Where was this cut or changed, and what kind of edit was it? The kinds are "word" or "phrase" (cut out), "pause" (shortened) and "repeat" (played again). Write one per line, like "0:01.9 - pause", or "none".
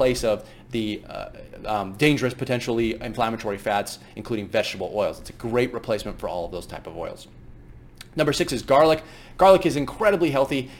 none